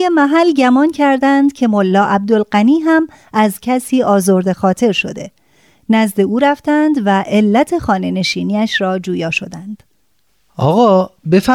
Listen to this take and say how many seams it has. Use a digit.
0